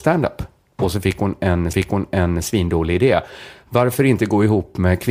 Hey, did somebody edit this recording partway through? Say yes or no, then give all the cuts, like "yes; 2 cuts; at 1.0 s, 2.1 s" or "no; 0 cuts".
yes; 1 cut; at 1.7 s